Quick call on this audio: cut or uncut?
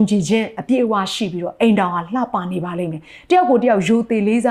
uncut